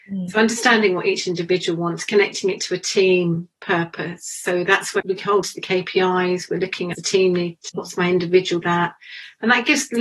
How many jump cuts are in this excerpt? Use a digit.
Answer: 6